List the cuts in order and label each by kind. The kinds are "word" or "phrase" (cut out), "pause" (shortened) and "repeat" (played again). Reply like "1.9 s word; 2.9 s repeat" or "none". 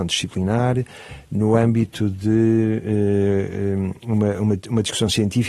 none